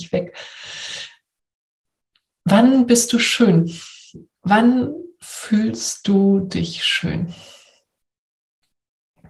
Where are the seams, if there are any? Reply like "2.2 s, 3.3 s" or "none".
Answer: none